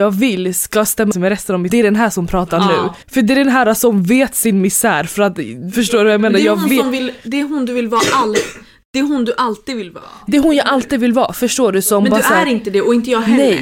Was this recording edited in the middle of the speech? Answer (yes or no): yes